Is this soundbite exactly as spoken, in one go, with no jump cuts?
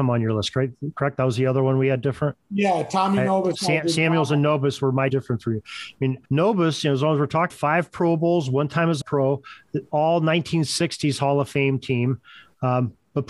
no; 4 cuts; at 5.1 s, 6.2 s, 7.5 s, 9.0 s

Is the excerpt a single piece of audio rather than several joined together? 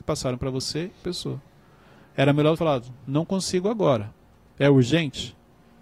no; 2 cuts; at 1.0 s, 2.5 s

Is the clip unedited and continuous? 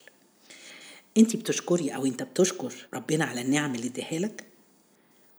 no; 1 cut; at 2.8 s

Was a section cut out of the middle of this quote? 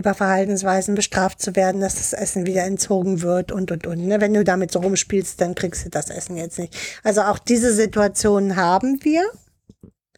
no; 0 cuts

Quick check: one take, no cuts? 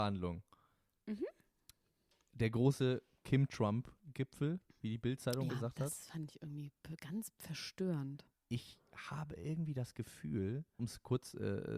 no; 3 cuts; at 4.7 s, 5.5 s, 10.8 s

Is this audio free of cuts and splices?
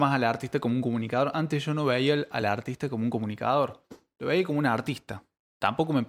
yes; 0 cuts

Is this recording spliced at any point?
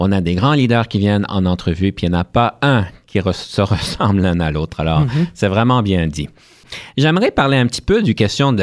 no; 0 cuts

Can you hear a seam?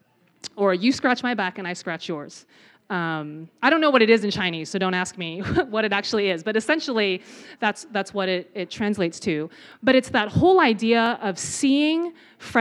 no; 0 cuts

